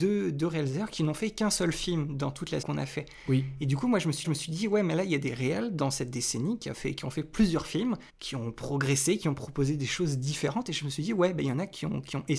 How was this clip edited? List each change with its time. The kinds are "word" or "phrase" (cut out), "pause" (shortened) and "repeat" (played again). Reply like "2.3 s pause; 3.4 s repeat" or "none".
2.6 s word; 4.2 s repeat; 8.1 s pause